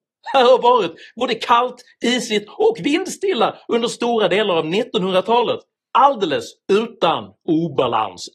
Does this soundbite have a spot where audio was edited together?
no; 0 cuts

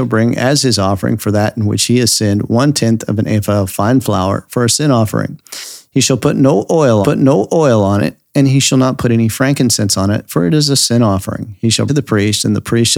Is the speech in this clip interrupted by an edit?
yes; 2 cuts; at 7.0 s, 11.9 s

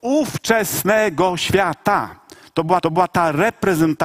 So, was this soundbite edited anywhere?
yes; 1 cut; at 2.8 s

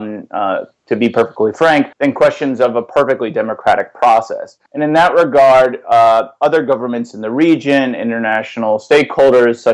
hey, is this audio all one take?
no; 2 cuts; at 1.9 s, 4.7 s

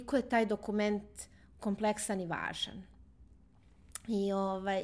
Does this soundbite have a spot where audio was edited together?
yes; 1 cut; at 1.6 s

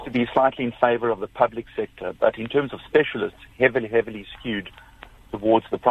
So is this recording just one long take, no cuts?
yes; 0 cuts

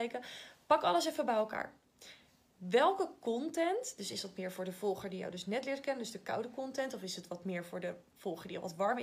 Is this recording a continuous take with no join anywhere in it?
yes; 0 cuts

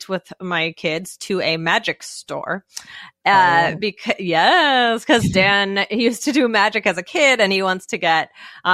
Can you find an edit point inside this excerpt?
no; 0 cuts

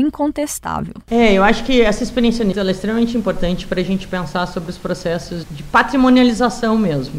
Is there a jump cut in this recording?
yes; 2 cuts; at 2.5 s, 5.4 s

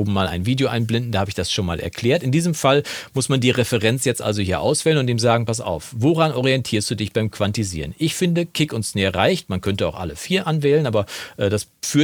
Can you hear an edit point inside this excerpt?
no; 0 cuts

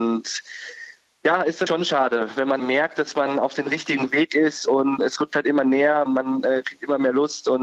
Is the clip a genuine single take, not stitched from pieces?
no; 4 cuts; at 1.7 s, 2.6 s, 5.0 s, 6.1 s

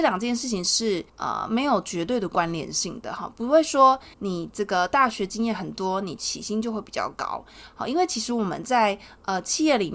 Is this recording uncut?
no; 2 cuts; at 1.1 s, 4.1 s

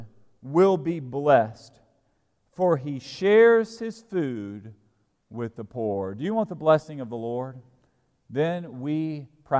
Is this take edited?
no; 0 cuts

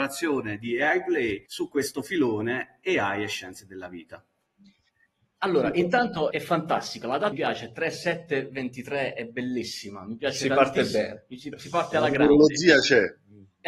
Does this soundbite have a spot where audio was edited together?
yes; 3 cuts; at 1.5 s, 6.3 s, 7.3 s

